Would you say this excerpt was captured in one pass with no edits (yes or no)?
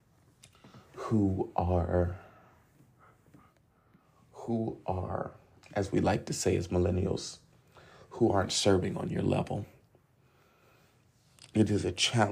yes